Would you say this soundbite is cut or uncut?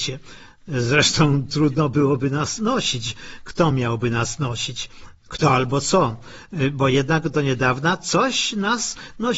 uncut